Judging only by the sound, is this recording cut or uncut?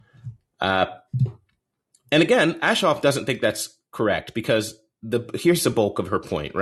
uncut